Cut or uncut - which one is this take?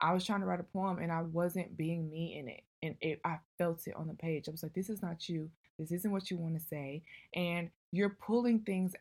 uncut